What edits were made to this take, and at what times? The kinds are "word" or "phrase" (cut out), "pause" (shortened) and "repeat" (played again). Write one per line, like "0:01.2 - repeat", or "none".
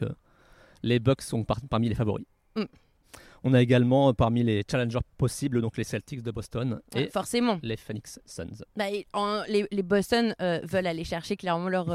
none